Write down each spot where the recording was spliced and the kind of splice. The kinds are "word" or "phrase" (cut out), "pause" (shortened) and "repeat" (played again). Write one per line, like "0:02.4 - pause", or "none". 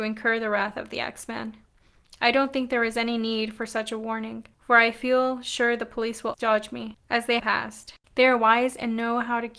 0:04.5 - pause
0:06.3 - word
0:07.0 - pause
0:07.4 - phrase

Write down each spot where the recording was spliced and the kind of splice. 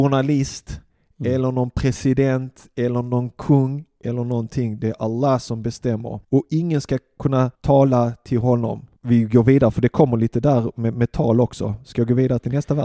0:06.2 - pause
0:07.5 - pause
0:09.0 - pause

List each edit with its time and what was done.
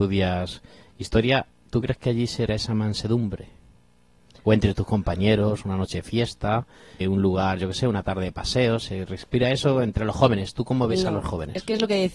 0:02.5 - word
0:07.0 - word

